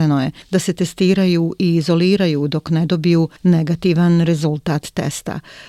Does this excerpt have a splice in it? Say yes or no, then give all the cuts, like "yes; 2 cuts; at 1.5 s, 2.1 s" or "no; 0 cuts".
no; 0 cuts